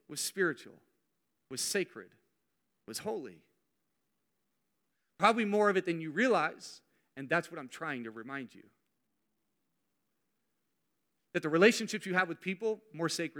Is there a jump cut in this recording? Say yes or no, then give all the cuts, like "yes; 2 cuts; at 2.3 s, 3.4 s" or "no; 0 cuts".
no; 0 cuts